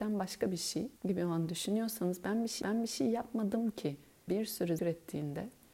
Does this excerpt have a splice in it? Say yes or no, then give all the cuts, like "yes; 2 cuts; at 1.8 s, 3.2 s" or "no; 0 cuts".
yes; 4 cuts; at 1.0 s, 2.6 s, 4.3 s, 4.8 s